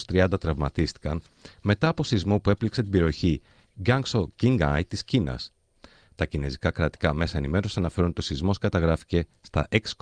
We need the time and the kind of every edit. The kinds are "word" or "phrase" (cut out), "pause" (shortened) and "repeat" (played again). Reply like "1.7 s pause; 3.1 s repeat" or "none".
none